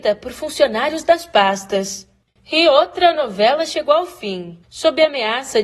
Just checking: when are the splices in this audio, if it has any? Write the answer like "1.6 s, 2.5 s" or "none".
none